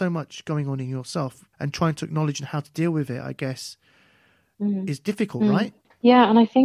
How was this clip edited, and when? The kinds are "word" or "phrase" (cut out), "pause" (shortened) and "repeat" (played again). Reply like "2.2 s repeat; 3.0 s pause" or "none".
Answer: 1.5 s pause